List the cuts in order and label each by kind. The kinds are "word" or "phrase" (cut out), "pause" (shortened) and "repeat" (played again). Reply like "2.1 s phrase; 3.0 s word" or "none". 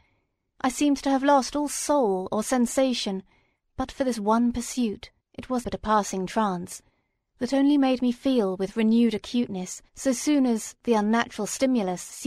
5.2 s pause; 5.6 s word; 9.9 s pause